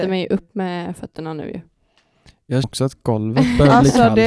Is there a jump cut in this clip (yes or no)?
yes